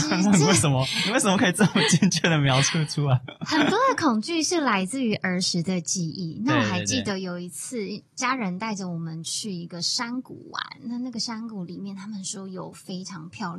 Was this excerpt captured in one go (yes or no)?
no